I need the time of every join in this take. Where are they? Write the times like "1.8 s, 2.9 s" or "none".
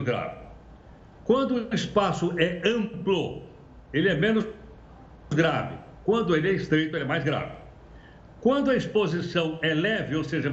none